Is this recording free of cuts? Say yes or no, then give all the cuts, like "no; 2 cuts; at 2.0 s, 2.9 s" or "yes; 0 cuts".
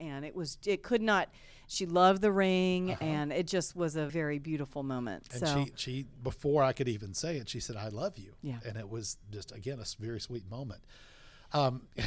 no; 1 cut; at 4.1 s